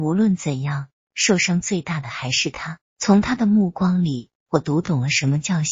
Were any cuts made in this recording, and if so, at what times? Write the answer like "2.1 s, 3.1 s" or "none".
2.9 s